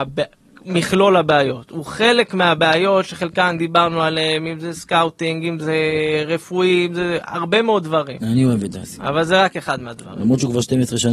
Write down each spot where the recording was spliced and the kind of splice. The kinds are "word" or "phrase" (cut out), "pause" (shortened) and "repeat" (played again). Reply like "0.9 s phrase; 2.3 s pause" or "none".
none